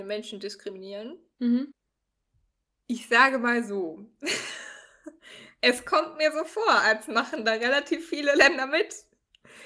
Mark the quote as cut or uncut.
uncut